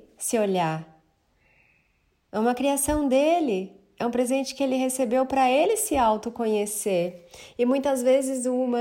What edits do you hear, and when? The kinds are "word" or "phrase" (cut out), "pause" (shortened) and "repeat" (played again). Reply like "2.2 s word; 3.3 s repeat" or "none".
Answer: none